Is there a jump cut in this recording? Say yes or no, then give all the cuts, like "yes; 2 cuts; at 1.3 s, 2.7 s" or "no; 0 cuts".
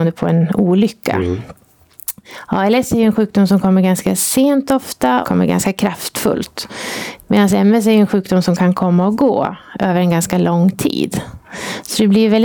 yes; 1 cut; at 5.2 s